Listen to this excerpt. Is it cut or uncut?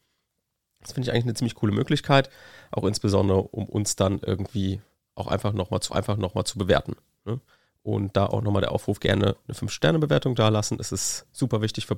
cut